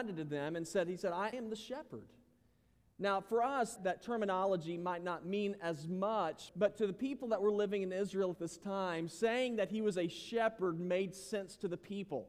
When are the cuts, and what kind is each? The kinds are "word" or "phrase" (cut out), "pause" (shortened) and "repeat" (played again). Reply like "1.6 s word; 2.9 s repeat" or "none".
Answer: 1.3 s word; 3.8 s word; 6.5 s word